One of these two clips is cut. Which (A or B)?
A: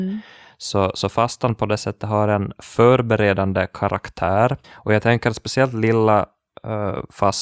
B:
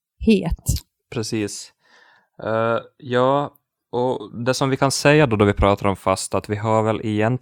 A